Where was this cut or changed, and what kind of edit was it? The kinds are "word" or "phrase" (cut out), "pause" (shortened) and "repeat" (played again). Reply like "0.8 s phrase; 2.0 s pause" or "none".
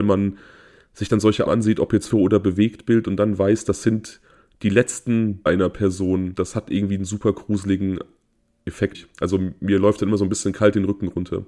1.5 s word; 2.1 s word; 5.5 s word; 8.9 s word